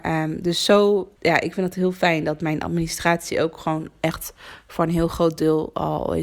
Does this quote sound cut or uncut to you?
cut